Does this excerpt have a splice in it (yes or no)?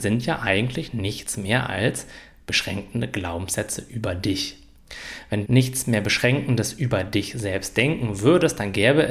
yes